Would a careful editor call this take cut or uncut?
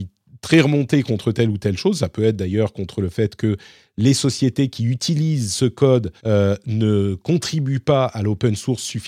cut